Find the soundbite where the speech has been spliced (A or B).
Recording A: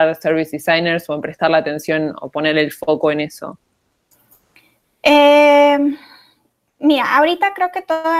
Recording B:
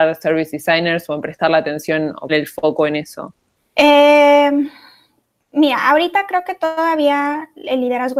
B